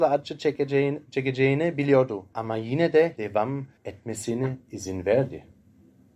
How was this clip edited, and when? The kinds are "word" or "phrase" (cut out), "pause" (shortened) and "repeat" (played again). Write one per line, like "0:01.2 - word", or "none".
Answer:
0:02.3 - pause
0:03.2 - word
0:03.8 - pause